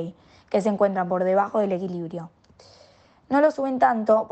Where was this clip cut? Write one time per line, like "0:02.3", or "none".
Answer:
none